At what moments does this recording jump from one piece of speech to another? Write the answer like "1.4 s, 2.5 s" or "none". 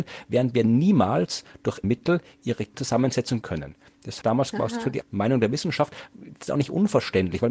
1.8 s, 2.7 s, 3.4 s, 4.2 s, 5.0 s